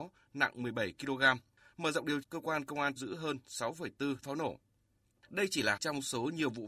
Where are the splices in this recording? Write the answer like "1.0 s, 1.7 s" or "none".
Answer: 2.2 s, 3.0 s, 4.2 s, 5.8 s